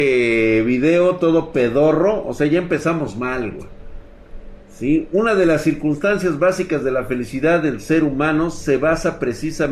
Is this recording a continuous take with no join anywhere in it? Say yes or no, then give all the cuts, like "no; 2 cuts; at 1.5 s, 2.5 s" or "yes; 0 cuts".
yes; 0 cuts